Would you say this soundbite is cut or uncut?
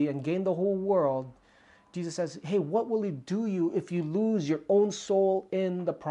uncut